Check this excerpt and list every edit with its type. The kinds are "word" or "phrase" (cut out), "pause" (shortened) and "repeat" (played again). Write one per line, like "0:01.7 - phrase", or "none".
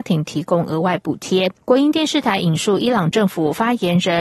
0:01.6 - pause

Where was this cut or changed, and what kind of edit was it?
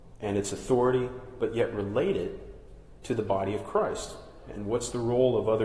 none

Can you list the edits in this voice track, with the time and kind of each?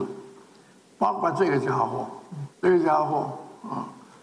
0:02.5 - pause

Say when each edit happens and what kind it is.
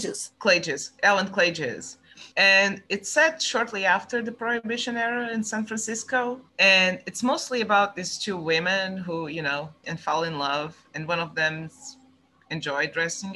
0:02.3 - pause
0:06.5 - pause
0:09.8 - word

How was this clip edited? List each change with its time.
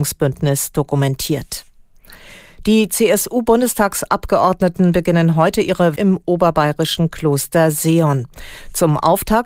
0:06.0 - word

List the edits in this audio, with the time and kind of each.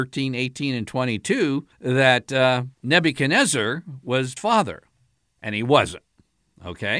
0:01.7 - pause
0:02.7 - pause
0:04.4 - word

